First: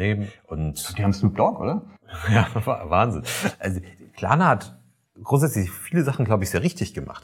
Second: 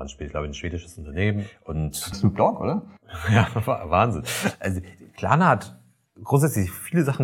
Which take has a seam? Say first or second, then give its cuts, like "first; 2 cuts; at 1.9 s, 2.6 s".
second; 1 cut; at 2.1 s